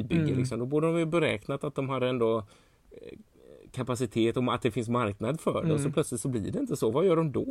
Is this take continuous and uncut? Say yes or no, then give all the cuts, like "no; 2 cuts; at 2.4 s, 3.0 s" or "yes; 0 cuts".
yes; 0 cuts